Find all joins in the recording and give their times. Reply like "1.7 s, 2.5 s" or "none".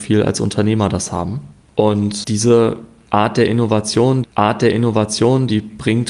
2.2 s, 4.2 s